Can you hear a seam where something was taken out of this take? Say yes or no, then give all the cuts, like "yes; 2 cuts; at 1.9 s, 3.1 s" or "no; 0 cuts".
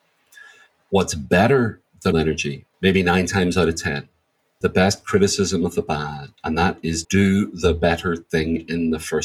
yes; 5 cuts; at 2.1 s, 2.7 s, 4.6 s, 6.4 s, 7.0 s